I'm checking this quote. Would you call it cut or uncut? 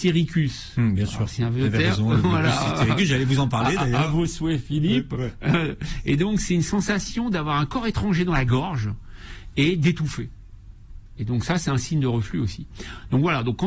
uncut